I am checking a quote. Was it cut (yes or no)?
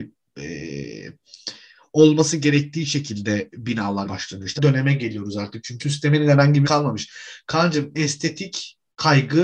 yes